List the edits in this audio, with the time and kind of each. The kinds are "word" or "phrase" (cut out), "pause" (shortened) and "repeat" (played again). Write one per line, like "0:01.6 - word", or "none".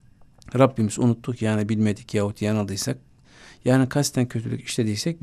none